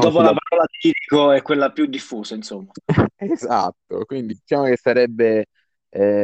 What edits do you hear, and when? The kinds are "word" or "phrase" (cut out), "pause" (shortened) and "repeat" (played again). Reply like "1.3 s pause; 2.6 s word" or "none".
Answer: 4.3 s word